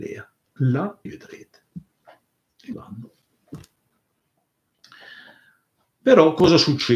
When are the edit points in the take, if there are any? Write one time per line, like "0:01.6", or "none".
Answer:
0:01.1
0:02.7